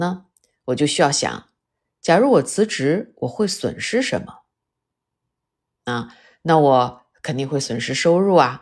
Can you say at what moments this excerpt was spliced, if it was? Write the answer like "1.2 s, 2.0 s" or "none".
none